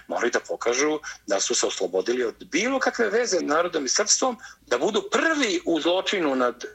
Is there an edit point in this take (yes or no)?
yes